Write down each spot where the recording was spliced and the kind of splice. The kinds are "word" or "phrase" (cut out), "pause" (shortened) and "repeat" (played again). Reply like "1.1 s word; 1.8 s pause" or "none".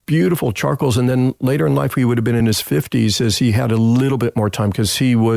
none